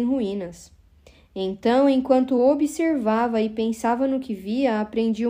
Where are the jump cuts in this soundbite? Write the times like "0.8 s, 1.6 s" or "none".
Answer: none